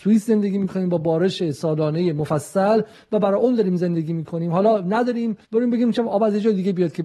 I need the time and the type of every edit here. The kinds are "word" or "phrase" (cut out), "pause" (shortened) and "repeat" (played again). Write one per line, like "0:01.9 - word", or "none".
0:05.4 - pause